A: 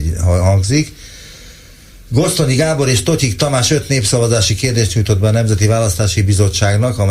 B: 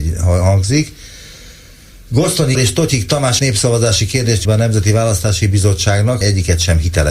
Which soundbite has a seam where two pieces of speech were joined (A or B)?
B